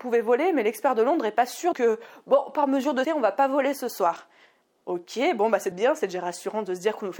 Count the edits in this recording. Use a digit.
3